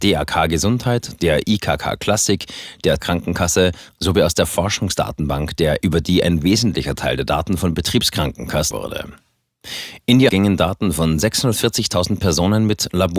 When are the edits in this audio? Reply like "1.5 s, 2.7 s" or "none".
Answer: 3.0 s, 5.8 s, 8.7 s, 10.3 s